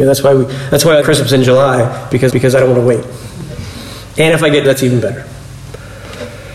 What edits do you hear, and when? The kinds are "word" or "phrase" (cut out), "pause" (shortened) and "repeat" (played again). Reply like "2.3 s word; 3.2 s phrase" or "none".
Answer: 1.0 s phrase; 2.3 s repeat; 4.6 s phrase